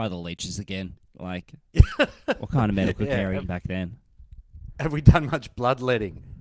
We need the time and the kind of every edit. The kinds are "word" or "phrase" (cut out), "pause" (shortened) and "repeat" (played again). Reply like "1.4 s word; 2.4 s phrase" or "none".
3.4 s word